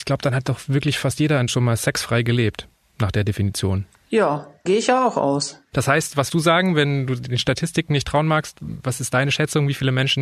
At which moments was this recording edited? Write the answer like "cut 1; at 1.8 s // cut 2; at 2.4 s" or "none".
cut 1; at 1.5 s // cut 2; at 4.7 s // cut 3; at 6.3 s